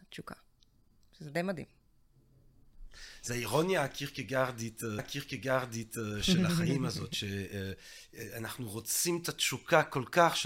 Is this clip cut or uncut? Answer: cut